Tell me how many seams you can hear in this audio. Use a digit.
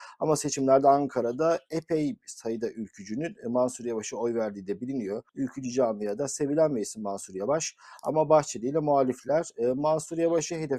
1